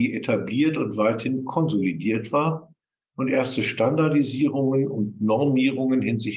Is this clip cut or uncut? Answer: uncut